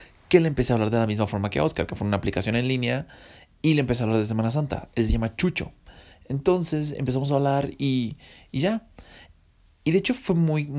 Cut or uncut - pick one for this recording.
uncut